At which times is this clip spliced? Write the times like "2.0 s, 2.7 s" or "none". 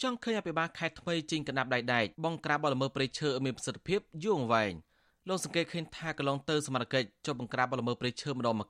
2.1 s